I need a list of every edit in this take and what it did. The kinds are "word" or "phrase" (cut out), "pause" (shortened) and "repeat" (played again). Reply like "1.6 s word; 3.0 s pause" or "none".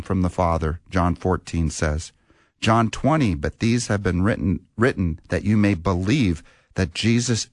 none

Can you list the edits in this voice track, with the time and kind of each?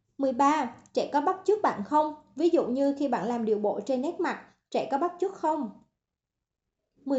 none

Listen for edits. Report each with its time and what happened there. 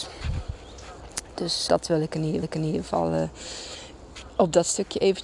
1.7 s word; 2.4 s repeat

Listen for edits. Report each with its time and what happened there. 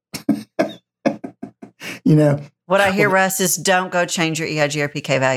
none

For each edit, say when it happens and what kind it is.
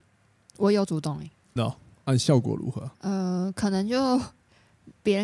1.6 s phrase; 2.9 s pause

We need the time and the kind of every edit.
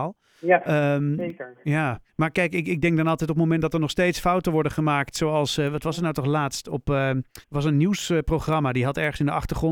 2.1 s pause; 7.4 s pause

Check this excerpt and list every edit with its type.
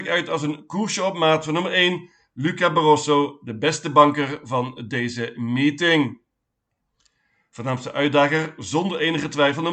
none

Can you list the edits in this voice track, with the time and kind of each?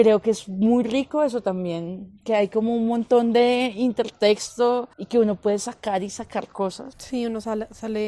4.9 s pause

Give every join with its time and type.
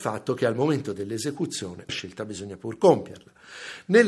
1.9 s word

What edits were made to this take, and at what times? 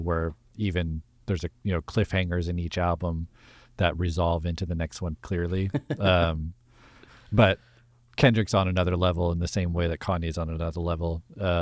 5.2 s word

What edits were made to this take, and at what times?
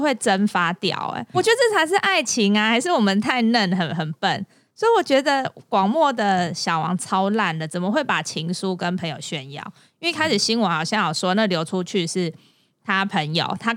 1.3 s word

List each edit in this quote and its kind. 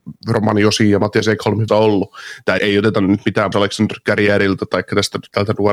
1.7 s word; 2.6 s word; 3.5 s word

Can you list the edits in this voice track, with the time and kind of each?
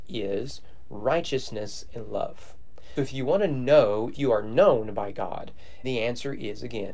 3.0 s word; 4.1 s word; 5.8 s word

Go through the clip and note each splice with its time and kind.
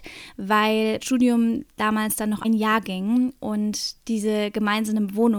1.0 s word; 2.4 s word

